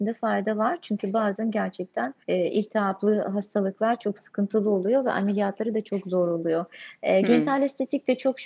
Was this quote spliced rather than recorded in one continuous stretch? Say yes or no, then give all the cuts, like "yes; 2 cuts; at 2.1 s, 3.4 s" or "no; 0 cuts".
yes; 1 cut; at 2.2 s